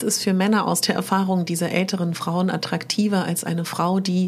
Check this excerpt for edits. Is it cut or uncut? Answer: uncut